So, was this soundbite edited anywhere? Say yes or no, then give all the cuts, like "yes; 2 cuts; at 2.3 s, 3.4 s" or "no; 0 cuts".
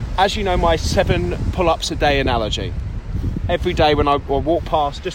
no; 0 cuts